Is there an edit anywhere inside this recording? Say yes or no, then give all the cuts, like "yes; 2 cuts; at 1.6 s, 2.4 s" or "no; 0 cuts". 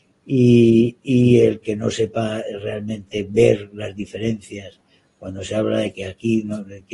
no; 0 cuts